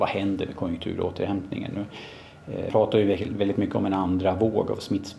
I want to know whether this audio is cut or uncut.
cut